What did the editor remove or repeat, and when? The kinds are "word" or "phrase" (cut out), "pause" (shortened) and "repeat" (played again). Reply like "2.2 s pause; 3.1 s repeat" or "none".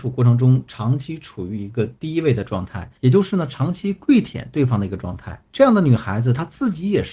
3.0 s pause; 5.5 s pause